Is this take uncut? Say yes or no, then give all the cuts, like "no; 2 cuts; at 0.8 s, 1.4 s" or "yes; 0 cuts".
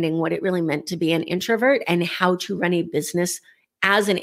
yes; 0 cuts